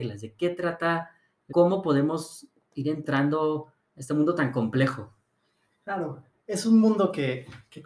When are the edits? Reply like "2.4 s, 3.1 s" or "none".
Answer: 1.5 s, 3.9 s